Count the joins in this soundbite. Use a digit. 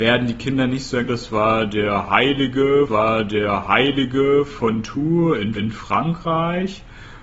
3